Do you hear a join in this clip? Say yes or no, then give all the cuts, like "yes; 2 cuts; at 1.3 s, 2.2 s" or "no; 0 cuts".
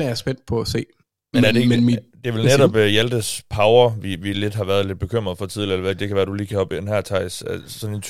no; 0 cuts